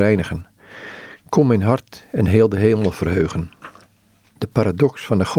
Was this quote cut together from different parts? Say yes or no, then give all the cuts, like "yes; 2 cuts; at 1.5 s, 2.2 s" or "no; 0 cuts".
no; 0 cuts